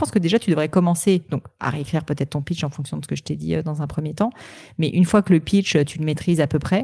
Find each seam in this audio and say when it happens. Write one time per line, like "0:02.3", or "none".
none